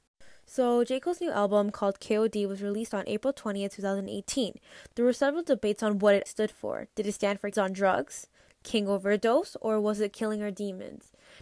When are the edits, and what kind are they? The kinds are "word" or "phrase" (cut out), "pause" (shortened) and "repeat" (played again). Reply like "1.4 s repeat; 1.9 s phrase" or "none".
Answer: 6.3 s word; 7.5 s word